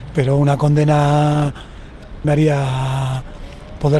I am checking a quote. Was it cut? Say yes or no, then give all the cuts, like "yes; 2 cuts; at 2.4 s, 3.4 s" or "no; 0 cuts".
yes; 1 cut; at 2.2 s